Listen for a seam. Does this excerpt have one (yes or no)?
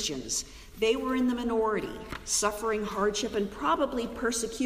no